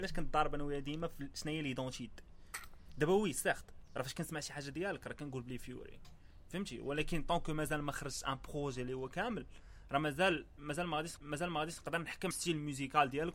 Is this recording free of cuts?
no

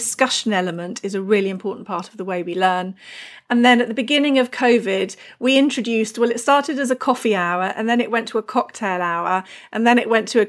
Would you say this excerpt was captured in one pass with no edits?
yes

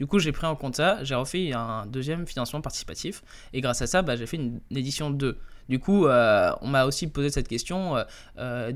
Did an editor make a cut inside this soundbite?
no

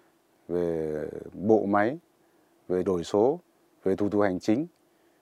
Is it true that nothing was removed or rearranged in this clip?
no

